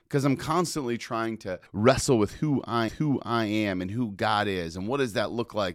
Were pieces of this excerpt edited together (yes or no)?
yes